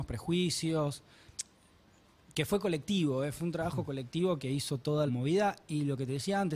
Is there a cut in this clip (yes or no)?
yes